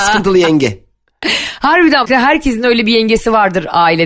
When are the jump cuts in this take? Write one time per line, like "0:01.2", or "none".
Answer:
0:02.0